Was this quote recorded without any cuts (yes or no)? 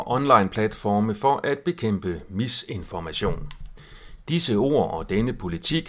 yes